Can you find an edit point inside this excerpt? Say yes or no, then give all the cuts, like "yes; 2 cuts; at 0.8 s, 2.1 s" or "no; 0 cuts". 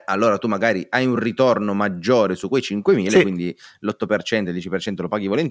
no; 0 cuts